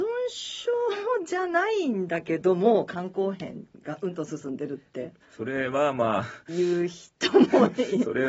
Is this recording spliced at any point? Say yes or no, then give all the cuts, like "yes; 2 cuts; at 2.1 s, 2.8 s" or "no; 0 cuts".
yes; 1 cut; at 5.2 s